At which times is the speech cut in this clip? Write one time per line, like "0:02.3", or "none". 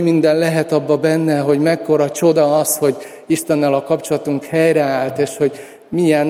none